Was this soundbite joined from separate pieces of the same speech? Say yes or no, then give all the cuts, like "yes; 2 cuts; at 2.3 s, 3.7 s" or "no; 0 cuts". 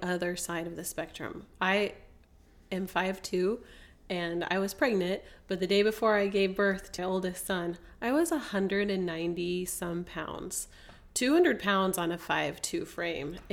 yes; 1 cut; at 7.0 s